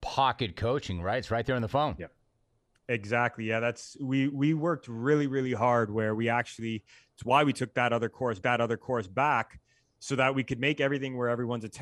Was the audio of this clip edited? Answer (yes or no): yes